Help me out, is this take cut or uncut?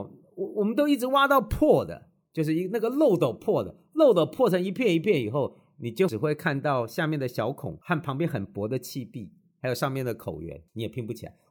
uncut